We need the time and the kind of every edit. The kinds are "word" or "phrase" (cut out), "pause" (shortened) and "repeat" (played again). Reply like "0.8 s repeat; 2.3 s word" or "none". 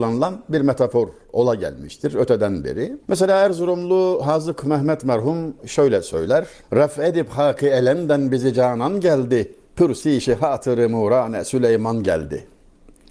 3.0 s pause; 6.6 s pause; 9.6 s pause